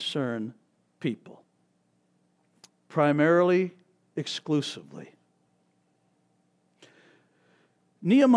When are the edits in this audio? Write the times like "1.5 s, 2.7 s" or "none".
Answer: 2.7 s